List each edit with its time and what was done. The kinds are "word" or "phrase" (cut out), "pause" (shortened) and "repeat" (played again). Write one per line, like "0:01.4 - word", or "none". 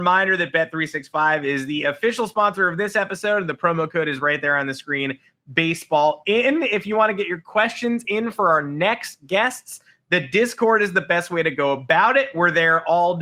none